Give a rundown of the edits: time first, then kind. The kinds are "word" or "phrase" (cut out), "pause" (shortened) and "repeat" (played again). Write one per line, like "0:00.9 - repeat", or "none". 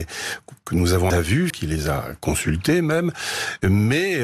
0:01.1 - phrase
0:01.5 - word